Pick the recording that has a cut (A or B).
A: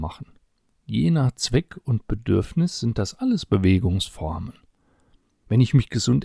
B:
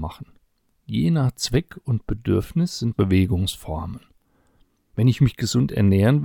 B